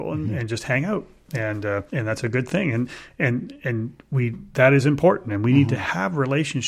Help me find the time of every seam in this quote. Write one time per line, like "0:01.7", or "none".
0:01.9